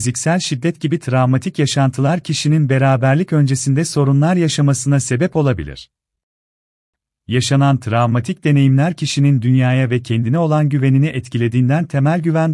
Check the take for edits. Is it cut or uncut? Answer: uncut